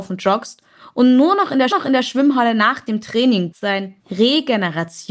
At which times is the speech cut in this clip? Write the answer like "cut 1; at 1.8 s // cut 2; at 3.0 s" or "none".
cut 1; at 1.7 s // cut 2; at 3.5 s // cut 3; at 4.0 s